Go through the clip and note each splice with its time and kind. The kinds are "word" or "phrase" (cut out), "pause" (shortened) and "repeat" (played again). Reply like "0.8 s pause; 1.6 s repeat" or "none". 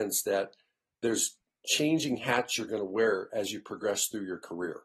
none